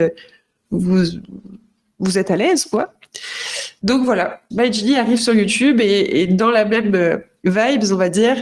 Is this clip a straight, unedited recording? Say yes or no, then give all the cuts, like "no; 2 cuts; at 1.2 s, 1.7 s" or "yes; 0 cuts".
no; 1 cut; at 4.5 s